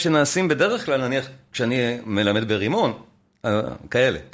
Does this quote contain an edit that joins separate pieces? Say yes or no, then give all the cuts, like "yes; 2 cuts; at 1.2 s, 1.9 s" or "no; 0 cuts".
no; 0 cuts